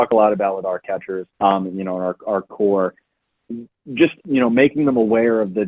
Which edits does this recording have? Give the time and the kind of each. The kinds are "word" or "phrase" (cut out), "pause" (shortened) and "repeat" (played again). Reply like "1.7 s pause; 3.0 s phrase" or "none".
1.3 s pause; 2.5 s word; 4.2 s pause